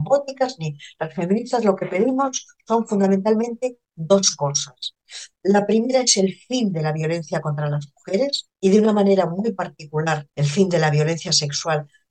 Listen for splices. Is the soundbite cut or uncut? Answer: cut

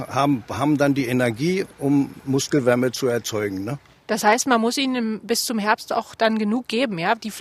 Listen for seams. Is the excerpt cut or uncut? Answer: uncut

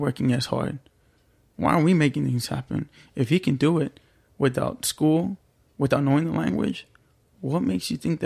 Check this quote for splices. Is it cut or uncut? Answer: uncut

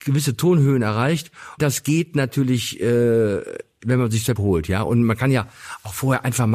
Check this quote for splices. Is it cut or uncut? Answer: cut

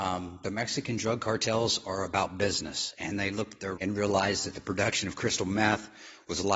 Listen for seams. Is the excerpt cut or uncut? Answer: cut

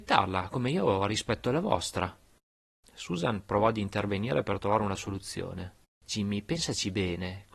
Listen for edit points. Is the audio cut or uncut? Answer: uncut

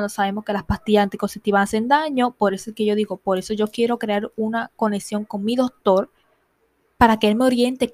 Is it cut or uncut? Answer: uncut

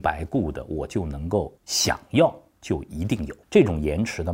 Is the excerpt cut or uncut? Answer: cut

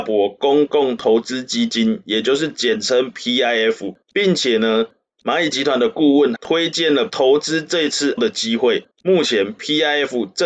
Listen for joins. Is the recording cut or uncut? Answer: cut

